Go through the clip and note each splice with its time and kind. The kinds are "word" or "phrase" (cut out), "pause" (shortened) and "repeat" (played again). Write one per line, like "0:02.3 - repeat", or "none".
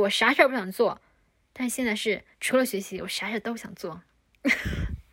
0:02.3 - pause